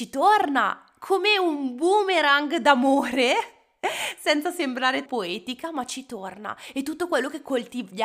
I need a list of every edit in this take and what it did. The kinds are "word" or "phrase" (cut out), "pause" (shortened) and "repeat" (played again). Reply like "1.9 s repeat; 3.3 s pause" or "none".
5.1 s word

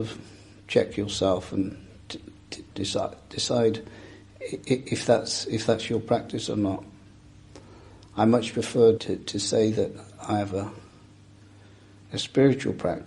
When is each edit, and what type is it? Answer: 2.7 s word; 9.0 s word

